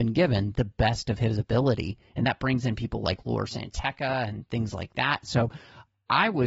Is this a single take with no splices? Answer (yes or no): yes